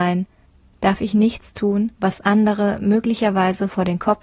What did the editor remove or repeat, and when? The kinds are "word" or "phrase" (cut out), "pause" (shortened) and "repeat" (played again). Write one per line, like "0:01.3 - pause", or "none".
0:01.9 - pause